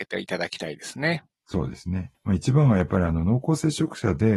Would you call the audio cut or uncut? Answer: cut